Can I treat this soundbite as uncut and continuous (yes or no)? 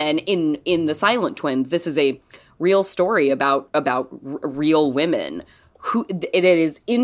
yes